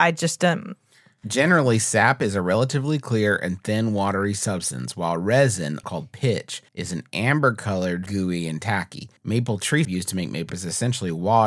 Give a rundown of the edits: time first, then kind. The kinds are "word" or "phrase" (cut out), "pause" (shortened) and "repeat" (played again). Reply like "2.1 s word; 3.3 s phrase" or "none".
5.8 s word; 6.7 s pause; 8.1 s word; 9.2 s pause; 9.8 s word; 10.5 s word